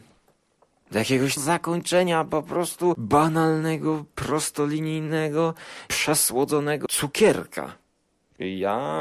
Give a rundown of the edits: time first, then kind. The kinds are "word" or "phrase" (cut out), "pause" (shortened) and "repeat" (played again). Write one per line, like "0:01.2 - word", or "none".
0:01.4 - phrase
0:06.9 - phrase